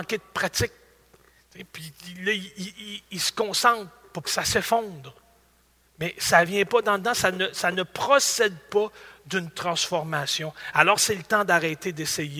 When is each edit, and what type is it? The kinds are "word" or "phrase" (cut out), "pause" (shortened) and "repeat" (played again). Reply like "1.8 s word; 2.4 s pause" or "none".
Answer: 4.2 s word; 6.5 s word